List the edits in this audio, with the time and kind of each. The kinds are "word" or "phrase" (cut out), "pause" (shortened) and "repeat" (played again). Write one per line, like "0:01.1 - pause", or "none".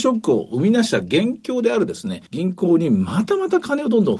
0:02.3 - pause